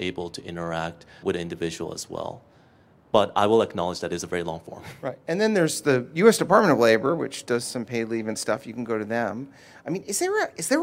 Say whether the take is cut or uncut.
cut